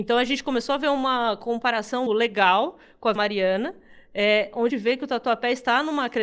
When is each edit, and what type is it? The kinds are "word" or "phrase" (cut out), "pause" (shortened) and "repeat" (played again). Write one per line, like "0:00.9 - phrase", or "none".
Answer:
0:02.1 - word
0:03.2 - word
0:04.7 - phrase